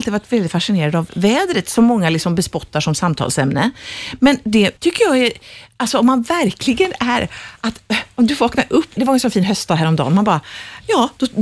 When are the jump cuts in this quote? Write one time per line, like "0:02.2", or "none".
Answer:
0:04.8
0:09.0